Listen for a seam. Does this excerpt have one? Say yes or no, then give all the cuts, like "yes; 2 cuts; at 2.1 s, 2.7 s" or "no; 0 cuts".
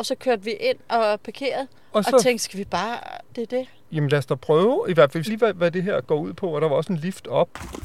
yes; 2 cuts; at 3.3 s, 5.2 s